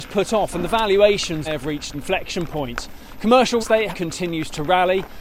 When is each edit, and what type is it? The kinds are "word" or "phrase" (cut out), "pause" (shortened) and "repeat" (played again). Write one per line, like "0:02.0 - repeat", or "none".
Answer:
0:01.4 - word
0:01.9 - word
0:03.6 - word
0:03.9 - word